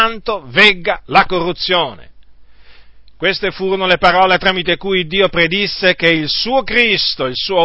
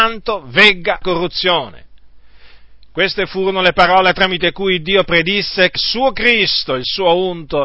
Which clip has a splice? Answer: second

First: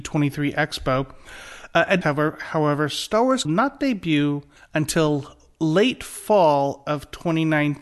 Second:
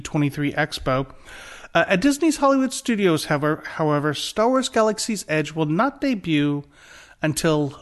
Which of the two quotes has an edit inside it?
first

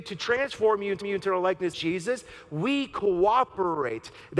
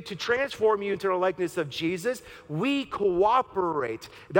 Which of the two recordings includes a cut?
first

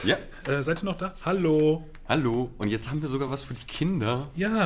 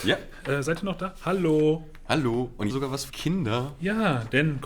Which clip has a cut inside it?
second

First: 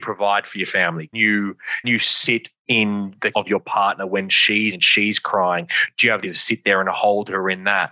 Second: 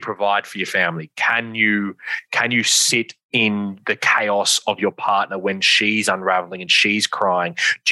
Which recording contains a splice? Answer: first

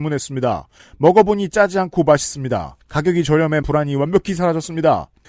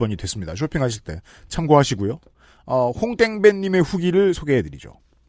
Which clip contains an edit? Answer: first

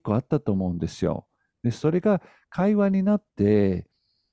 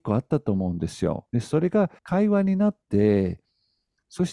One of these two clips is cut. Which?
second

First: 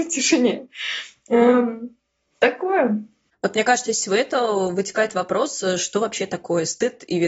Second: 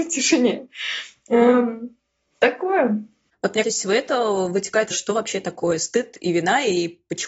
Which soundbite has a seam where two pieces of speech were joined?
second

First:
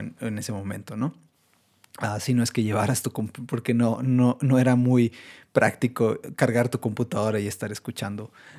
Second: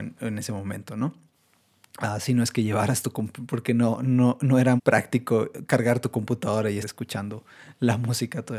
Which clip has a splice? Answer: second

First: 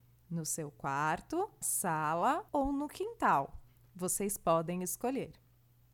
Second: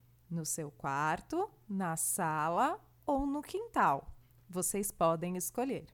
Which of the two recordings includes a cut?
first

